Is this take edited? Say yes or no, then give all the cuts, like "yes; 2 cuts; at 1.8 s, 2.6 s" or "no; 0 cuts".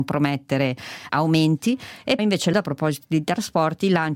yes; 3 cuts; at 1.1 s, 2.2 s, 2.5 s